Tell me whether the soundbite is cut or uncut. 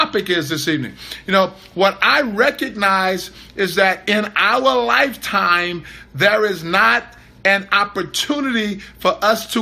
uncut